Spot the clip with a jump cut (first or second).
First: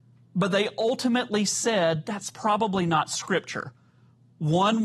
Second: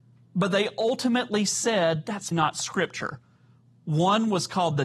second